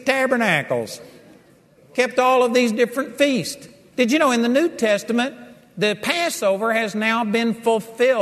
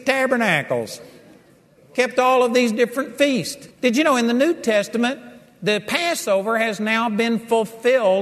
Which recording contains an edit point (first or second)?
second